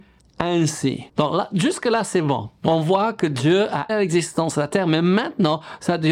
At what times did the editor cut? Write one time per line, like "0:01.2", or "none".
0:01.1
0:03.9